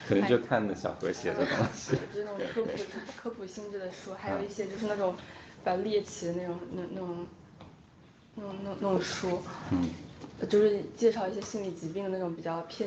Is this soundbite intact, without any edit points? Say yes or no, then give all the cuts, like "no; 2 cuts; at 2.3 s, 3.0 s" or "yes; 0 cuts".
yes; 0 cuts